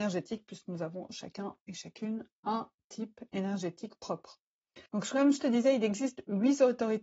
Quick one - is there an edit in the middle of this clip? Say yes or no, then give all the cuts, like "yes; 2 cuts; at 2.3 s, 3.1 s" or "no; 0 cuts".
yes; 1 cut; at 4.9 s